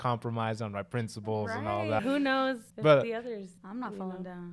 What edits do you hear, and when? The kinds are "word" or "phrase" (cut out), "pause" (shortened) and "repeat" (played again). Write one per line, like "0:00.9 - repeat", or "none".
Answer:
0:02.0 - word
0:02.7 - pause
0:03.6 - pause